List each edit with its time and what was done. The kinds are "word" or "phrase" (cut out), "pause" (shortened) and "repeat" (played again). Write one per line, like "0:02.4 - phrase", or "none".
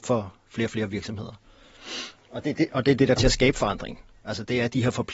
0:03.2 - word